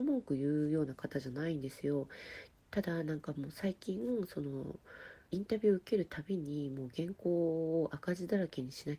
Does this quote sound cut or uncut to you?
cut